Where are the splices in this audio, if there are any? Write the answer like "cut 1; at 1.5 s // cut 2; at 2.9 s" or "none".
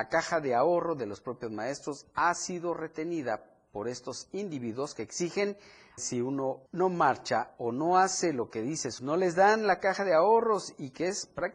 cut 1; at 6.0 s // cut 2; at 6.7 s // cut 3; at 9.0 s